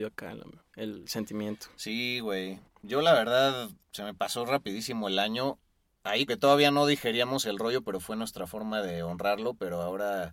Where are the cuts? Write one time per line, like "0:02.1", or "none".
0:03.8
0:06.3